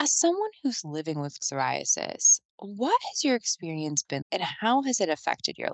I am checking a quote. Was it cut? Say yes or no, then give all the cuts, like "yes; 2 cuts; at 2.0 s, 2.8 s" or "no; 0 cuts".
yes; 2 cuts; at 1.4 s, 4.2 s